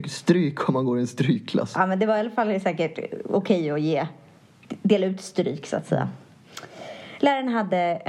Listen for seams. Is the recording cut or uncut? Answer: uncut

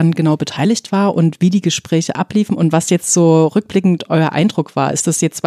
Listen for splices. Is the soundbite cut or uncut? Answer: uncut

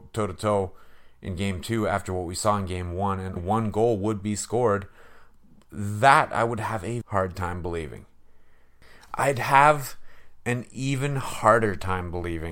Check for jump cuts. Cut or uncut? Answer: cut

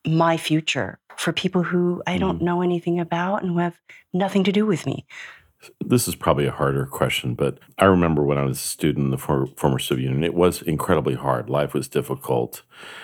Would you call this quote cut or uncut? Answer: cut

